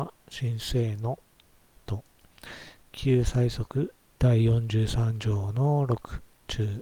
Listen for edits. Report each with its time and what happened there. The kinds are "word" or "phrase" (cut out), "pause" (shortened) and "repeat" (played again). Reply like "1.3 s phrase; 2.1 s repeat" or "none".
none